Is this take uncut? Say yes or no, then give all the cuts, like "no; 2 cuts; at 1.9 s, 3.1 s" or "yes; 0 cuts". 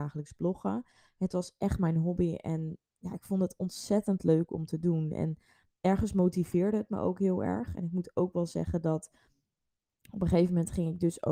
yes; 0 cuts